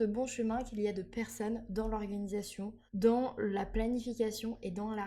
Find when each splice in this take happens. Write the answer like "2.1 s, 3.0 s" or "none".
2.9 s